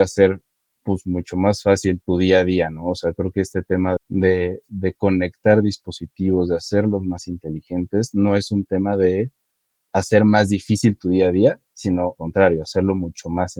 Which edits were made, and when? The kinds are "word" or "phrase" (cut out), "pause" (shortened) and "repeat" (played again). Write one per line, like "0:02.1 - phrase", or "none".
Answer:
0:02.0 - word
0:04.0 - word
0:09.9 - word
0:12.2 - word